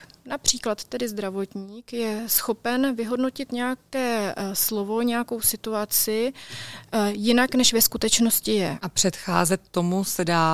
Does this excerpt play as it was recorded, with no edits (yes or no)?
yes